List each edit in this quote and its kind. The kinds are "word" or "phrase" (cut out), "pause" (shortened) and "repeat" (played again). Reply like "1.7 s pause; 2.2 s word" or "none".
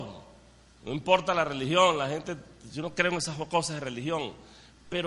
none